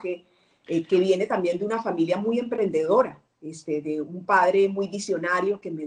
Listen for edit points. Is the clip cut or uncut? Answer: cut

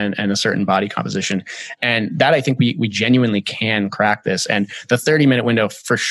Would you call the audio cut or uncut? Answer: uncut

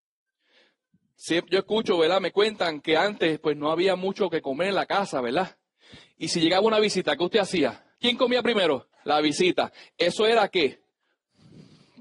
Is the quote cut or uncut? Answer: cut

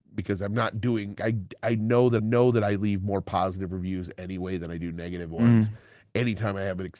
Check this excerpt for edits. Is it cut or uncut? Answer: cut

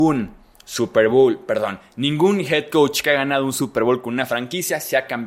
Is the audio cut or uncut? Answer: uncut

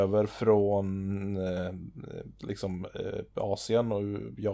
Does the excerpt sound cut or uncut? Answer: uncut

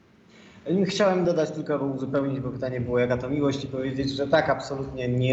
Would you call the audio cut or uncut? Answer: uncut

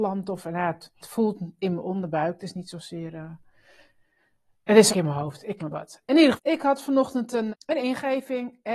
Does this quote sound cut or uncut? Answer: cut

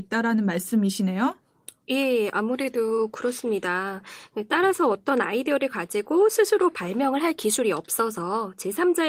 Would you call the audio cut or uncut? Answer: uncut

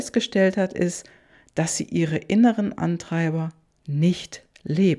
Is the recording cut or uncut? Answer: uncut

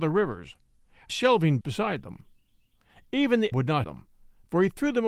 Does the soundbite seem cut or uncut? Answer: cut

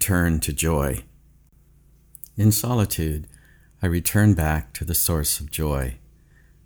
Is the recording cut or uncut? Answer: uncut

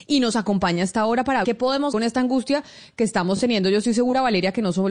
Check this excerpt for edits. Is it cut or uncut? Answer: cut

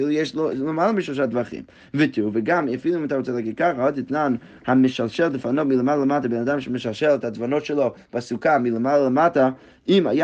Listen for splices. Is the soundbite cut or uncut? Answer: uncut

